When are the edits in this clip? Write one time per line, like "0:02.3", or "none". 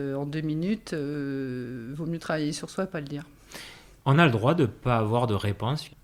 none